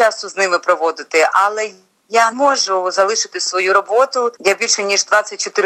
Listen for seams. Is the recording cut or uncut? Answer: cut